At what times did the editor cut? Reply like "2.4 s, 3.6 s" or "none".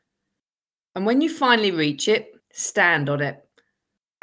2.4 s